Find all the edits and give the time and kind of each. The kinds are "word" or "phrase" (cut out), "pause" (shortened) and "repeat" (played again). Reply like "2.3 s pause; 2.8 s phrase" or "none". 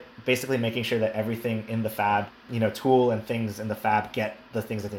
none